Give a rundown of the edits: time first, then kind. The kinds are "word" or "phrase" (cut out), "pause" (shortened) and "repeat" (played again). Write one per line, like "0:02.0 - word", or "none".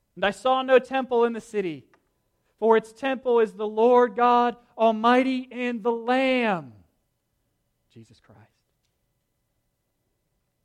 none